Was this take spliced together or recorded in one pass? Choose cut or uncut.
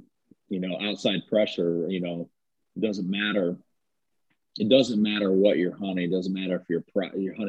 uncut